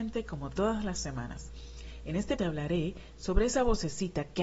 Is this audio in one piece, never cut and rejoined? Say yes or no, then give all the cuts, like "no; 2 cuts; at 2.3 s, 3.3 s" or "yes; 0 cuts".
no; 1 cut; at 2.4 s